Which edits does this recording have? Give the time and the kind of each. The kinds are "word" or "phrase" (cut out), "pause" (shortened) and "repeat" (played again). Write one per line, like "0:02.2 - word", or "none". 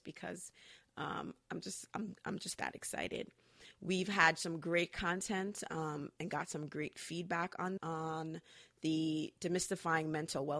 0:07.8 - word